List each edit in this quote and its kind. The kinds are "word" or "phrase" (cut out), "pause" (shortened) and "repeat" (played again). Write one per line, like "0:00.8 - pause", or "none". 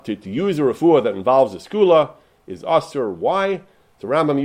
none